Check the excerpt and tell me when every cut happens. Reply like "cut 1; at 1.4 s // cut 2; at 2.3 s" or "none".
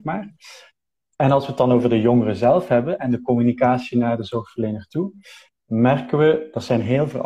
none

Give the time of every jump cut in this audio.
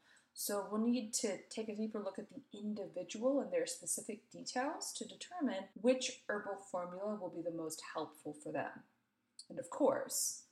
cut 1; at 5.7 s

